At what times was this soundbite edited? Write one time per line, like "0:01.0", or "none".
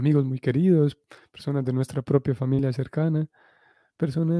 none